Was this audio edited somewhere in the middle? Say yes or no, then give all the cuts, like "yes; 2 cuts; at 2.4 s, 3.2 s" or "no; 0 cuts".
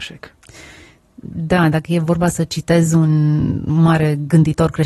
no; 0 cuts